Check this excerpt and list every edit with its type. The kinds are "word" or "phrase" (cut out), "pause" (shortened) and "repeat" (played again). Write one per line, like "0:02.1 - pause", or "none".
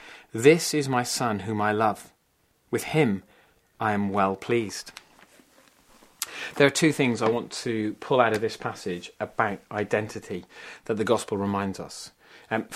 none